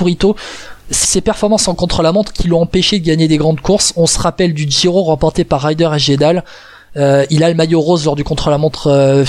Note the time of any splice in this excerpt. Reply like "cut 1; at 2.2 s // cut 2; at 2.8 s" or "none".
cut 1; at 1.0 s